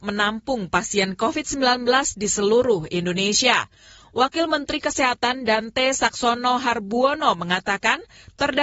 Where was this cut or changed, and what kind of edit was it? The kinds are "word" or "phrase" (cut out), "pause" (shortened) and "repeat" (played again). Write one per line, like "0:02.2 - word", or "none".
none